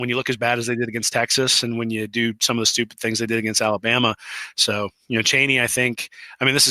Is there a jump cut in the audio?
no; 0 cuts

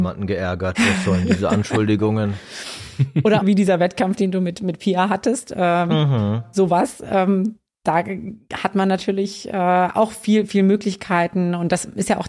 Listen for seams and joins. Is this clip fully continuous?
no; 1 cut; at 3.4 s

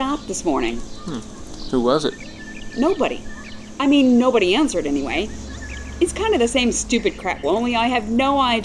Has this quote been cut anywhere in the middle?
yes; 1 cut; at 7.4 s

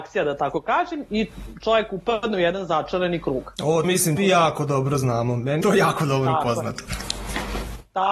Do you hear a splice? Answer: yes; 3 cuts; at 3.8 s, 4.2 s, 5.6 s

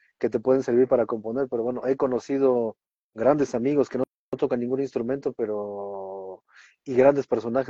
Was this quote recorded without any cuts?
yes; 0 cuts

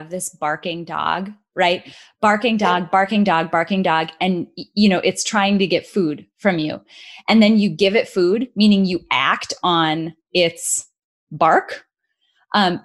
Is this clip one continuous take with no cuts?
yes; 0 cuts

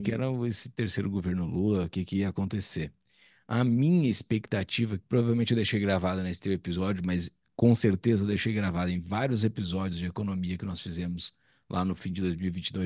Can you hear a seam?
no; 0 cuts

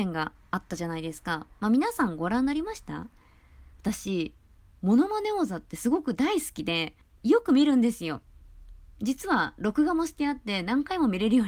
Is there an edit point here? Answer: yes; 2 cuts; at 3.7 s, 7.0 s

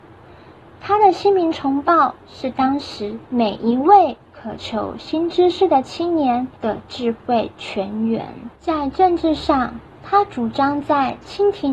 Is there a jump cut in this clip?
yes; 3 cuts; at 3.2 s, 6.6 s, 8.6 s

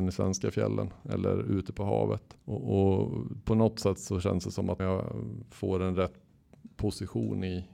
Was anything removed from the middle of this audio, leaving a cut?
yes; 2 cuts; at 2.4 s, 4.8 s

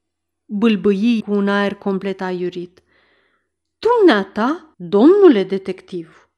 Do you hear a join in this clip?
yes; 2 cuts; at 1.2 s, 4.7 s

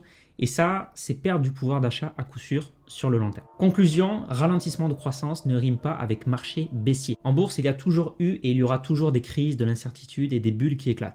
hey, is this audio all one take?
yes; 0 cuts

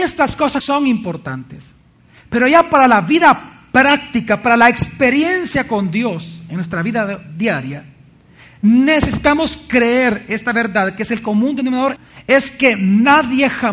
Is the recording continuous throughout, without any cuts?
yes; 0 cuts

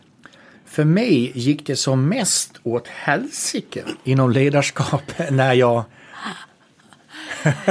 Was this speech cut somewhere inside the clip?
no; 0 cuts

